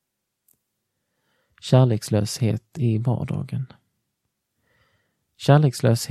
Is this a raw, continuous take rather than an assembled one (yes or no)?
yes